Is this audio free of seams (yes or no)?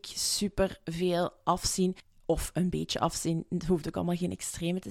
yes